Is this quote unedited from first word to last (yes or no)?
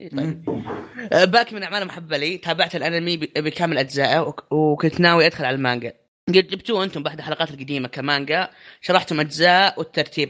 yes